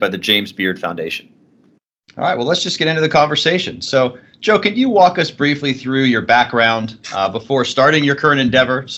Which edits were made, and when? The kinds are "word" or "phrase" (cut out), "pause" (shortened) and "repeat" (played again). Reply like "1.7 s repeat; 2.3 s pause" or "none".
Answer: none